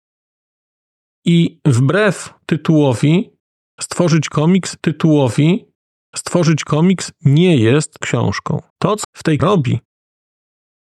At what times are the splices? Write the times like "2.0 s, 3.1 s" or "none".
4.8 s, 8.0 s, 8.7 s, 9.0 s, 9.4 s